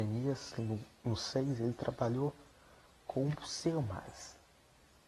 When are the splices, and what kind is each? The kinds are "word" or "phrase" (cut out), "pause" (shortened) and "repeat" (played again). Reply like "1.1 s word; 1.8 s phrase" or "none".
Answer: none